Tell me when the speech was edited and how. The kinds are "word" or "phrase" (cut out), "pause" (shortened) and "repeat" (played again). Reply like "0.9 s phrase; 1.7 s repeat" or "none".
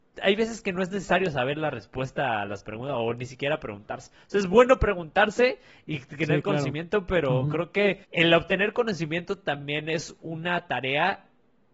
8.0 s pause